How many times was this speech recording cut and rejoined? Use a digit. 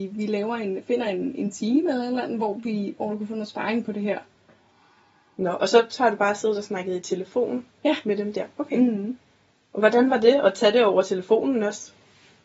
0